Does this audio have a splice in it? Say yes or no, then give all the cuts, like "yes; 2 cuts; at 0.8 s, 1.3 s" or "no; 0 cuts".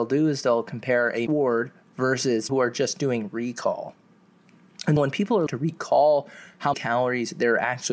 yes; 5 cuts; at 1.3 s, 2.5 s, 5.0 s, 5.5 s, 6.7 s